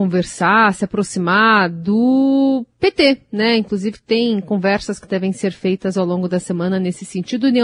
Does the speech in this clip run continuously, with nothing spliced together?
yes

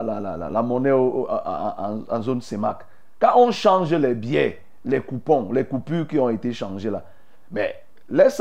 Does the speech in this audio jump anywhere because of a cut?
no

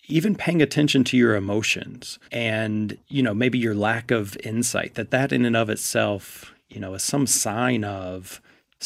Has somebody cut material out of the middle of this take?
yes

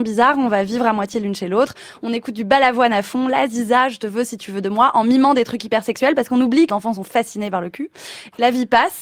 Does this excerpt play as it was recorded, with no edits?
no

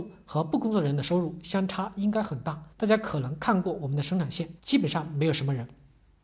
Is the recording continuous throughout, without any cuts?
no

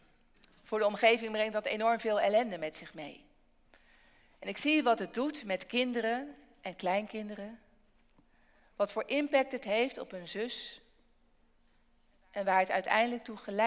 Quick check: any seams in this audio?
no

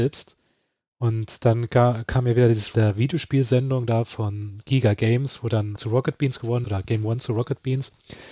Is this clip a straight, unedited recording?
no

